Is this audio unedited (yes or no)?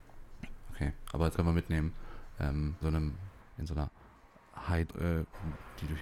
no